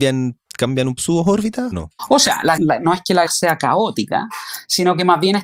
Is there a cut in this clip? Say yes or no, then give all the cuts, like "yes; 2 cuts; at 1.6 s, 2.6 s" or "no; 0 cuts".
yes; 4 cuts; at 1.0 s, 1.7 s, 2.6 s, 3.3 s